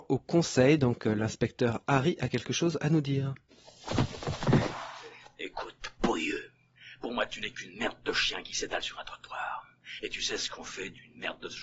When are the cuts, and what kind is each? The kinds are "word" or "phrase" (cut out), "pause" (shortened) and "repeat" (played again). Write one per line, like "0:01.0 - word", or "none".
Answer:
none

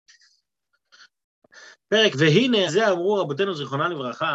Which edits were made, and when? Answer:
0:02.1 - word
0:02.7 - word

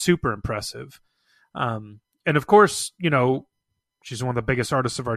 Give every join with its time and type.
none

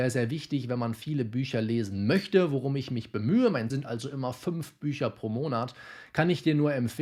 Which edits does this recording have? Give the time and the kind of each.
0:03.7 - word

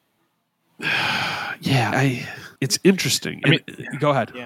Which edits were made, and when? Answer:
0:01.9 - word
0:02.6 - pause

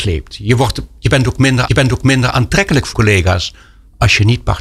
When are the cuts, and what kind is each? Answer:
0:01.7 - repeat
0:02.9 - word

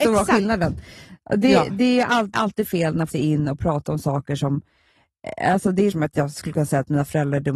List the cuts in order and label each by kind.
0:02.3 - word
0:03.1 - phrase
0:05.9 - word

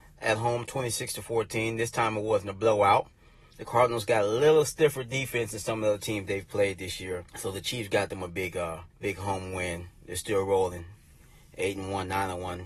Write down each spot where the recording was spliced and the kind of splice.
0:07.3 - pause
0:08.9 - pause

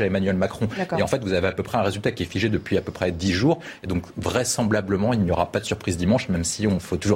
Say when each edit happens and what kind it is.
none

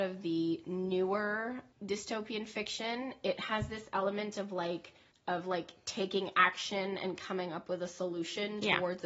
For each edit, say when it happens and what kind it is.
0:01.7 - pause
0:05.1 - pause

